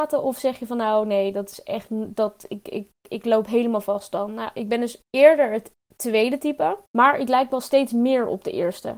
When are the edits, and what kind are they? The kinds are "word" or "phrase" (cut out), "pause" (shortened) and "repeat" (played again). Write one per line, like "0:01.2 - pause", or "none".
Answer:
0:06.9 - pause